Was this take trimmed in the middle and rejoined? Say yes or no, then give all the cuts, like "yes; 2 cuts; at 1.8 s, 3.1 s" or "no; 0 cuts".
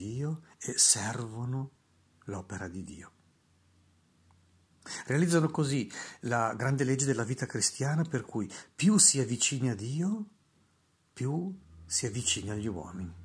no; 0 cuts